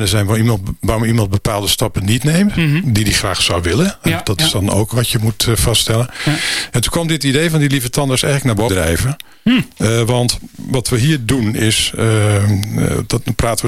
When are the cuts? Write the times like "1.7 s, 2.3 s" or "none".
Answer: 4.9 s, 8.7 s